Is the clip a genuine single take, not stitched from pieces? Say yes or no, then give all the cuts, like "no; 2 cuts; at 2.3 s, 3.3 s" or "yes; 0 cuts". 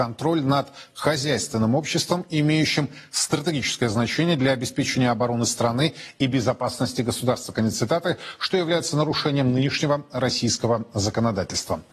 yes; 0 cuts